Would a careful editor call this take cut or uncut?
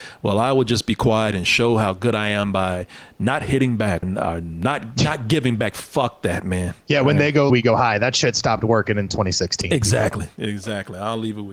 cut